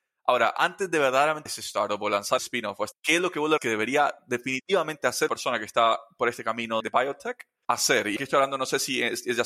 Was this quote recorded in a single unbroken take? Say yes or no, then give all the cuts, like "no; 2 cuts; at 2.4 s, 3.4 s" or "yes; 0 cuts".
no; 7 cuts; at 1.5 s, 2.4 s, 2.9 s, 3.6 s, 5.3 s, 6.8 s, 8.2 s